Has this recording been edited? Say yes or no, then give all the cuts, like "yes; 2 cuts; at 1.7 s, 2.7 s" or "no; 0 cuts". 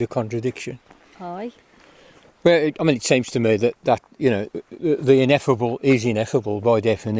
no; 0 cuts